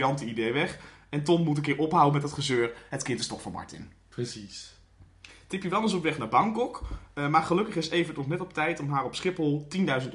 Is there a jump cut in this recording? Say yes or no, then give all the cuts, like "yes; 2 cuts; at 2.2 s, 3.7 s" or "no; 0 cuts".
no; 0 cuts